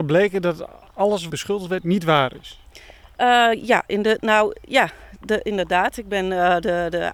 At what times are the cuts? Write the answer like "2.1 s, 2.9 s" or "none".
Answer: 1.3 s